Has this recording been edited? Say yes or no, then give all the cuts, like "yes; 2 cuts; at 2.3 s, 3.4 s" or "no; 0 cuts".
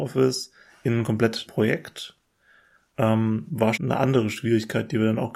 yes; 2 cuts; at 1.5 s, 3.8 s